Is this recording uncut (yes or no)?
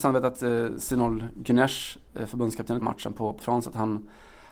no